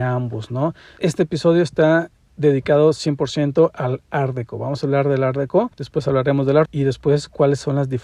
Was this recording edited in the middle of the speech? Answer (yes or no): yes